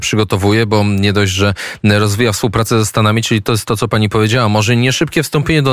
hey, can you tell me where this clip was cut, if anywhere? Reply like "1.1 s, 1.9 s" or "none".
none